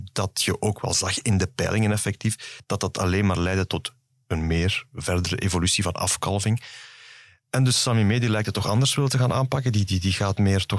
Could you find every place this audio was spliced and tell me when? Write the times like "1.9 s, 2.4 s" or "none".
none